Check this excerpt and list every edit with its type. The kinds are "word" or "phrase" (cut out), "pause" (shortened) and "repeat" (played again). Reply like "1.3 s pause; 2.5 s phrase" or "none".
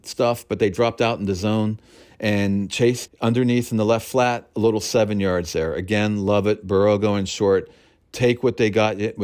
3.1 s word